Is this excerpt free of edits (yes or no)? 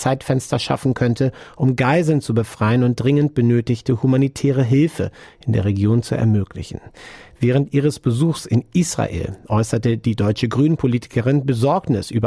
yes